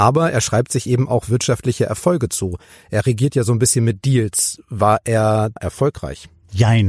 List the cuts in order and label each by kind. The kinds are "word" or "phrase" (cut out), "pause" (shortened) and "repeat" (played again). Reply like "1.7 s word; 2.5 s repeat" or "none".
5.6 s word